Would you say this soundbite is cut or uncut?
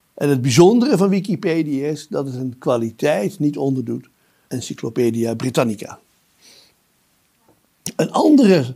cut